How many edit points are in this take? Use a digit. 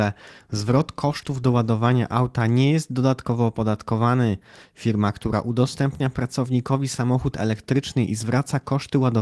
0